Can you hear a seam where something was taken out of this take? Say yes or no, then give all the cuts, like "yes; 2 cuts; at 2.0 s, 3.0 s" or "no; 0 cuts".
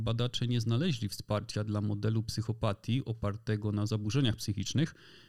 no; 0 cuts